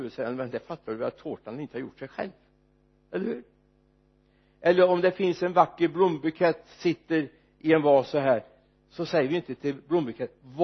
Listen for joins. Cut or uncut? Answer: uncut